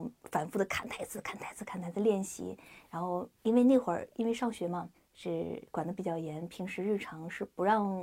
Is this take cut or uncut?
cut